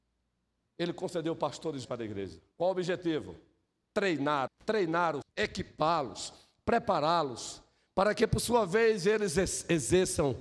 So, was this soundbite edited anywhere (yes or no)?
yes